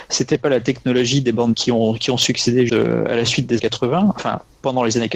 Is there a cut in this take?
yes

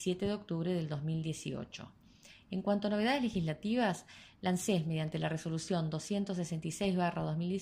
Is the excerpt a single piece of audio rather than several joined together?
yes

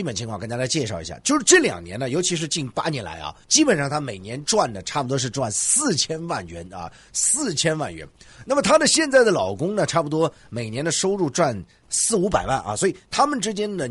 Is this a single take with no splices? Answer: no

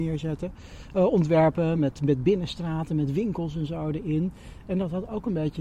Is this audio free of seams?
yes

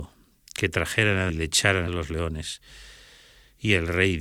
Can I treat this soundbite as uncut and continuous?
no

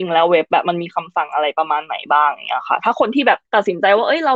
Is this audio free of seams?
no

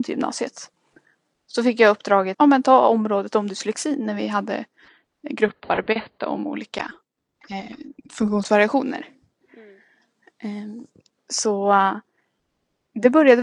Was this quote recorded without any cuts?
no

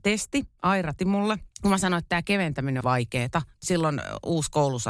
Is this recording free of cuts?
no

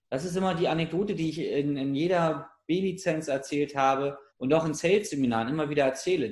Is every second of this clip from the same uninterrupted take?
no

